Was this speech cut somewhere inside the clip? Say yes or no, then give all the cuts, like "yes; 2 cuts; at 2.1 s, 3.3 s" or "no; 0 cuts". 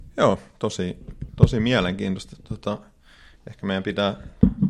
no; 0 cuts